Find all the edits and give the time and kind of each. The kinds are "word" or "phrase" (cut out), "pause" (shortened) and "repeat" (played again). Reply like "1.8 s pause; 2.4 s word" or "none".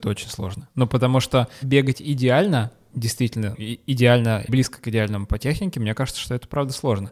3.5 s word; 4.5 s word